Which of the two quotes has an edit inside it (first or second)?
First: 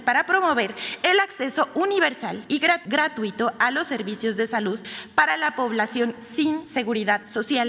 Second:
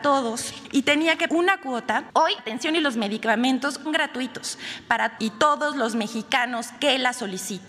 second